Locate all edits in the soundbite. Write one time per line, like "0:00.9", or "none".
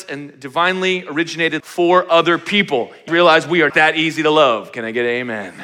0:01.6
0:03.1
0:03.7